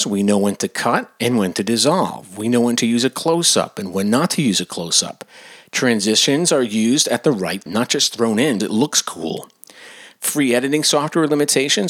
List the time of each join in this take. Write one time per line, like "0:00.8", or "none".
0:07.7
0:08.6